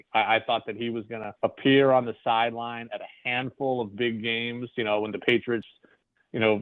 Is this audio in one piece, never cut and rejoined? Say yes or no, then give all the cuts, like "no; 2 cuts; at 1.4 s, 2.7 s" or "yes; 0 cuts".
no; 1 cut; at 1.4 s